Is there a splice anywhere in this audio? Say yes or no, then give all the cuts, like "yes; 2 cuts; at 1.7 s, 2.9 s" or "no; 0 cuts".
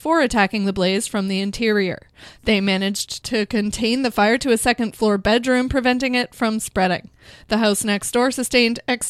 no; 0 cuts